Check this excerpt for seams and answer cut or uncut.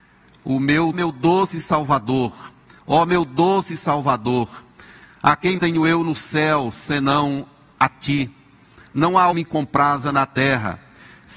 cut